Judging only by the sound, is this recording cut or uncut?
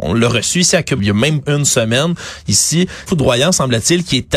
cut